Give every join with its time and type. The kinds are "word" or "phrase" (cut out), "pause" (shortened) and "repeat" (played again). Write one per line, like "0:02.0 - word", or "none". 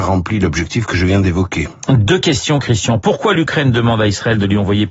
none